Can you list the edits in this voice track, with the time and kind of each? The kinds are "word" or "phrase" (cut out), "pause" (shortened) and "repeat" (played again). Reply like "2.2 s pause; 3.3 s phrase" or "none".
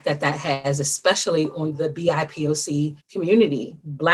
3.0 s pause